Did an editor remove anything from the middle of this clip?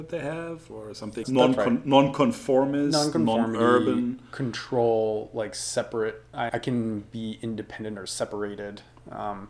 yes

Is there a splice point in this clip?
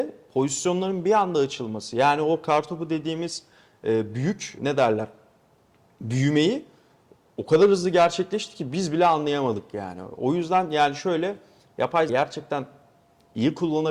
yes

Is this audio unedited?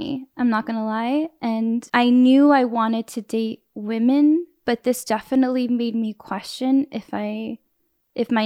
yes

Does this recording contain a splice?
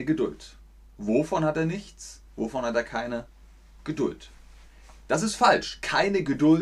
no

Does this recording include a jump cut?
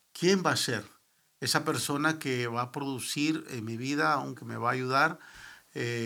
yes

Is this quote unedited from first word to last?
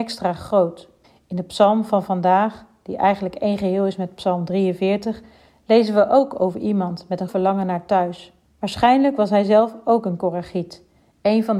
no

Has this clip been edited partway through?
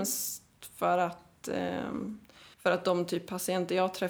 yes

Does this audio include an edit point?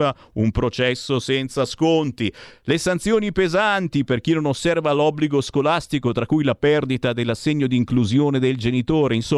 no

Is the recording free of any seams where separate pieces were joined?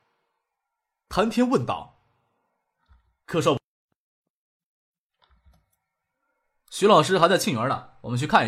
yes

